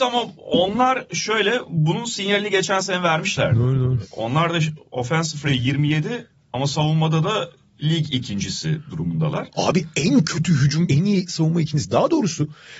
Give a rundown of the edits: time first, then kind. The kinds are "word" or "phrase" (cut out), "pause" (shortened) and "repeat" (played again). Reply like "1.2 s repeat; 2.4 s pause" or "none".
5.5 s word; 10.9 s word